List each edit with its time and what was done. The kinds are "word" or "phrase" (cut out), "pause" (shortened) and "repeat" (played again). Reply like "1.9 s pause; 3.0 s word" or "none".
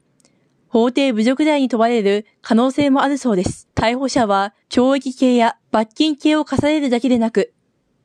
3.7 s pause; 4.6 s pause; 5.6 s pause